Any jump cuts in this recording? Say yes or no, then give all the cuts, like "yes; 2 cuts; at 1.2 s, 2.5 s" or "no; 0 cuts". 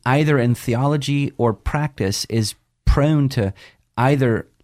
no; 0 cuts